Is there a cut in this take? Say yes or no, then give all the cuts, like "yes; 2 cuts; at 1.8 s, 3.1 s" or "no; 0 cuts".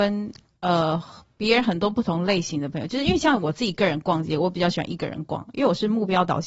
no; 0 cuts